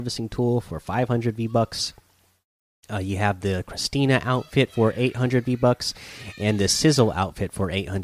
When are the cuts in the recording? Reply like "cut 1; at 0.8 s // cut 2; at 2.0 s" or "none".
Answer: none